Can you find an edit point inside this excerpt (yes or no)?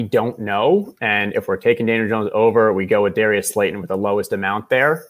no